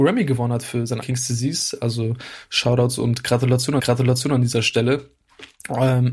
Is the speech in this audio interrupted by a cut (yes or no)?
yes